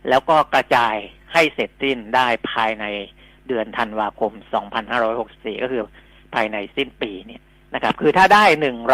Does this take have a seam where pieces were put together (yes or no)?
no